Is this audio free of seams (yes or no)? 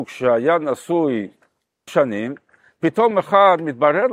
no